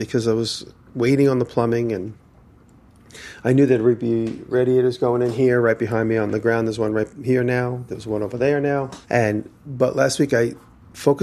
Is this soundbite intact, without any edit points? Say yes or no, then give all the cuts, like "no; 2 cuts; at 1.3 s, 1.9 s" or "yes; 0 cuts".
no; 1 cut; at 9.0 s